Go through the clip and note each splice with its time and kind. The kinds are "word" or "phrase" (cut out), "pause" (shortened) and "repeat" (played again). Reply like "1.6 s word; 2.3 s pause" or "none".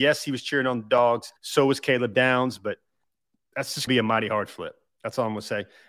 1.4 s pause; 3.0 s pause; 3.9 s phrase